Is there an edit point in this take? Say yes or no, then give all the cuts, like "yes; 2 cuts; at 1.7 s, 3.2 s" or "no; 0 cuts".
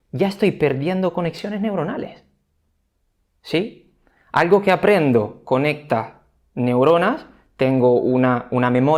no; 0 cuts